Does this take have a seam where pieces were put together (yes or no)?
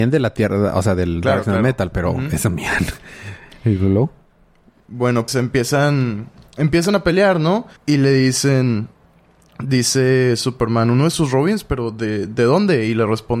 yes